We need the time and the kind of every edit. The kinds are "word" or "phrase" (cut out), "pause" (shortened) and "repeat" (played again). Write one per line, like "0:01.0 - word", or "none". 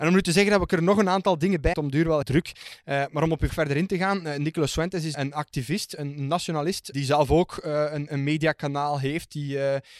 0:01.7 - phrase
0:02.2 - word
0:03.5 - word
0:05.1 - word
0:06.9 - phrase